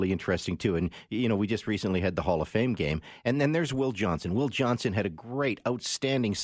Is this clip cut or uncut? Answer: uncut